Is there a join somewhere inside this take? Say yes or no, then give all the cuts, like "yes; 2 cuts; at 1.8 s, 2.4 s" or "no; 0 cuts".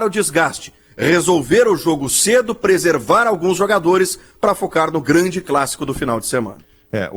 no; 0 cuts